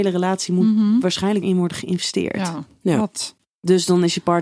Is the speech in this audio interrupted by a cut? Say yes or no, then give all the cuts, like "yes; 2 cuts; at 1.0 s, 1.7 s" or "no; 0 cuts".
yes; 1 cut; at 1.4 s